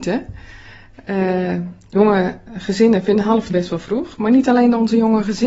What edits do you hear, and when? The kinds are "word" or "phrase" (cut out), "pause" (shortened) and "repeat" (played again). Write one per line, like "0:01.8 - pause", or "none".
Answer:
0:03.5 - word